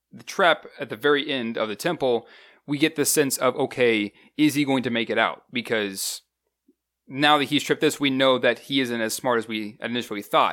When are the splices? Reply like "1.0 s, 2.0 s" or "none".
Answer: none